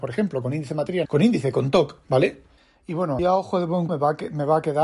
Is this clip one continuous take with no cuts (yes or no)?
no